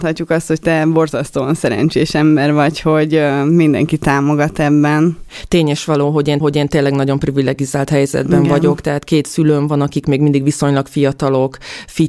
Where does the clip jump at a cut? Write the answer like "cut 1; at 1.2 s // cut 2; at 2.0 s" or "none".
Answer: cut 1; at 6.4 s